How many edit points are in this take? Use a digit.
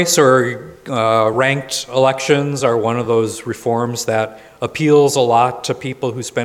0